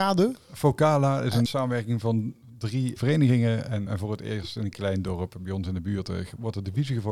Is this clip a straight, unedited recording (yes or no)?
no